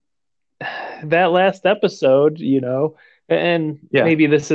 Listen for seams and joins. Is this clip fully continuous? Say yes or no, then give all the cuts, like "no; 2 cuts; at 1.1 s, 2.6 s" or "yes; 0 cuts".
yes; 0 cuts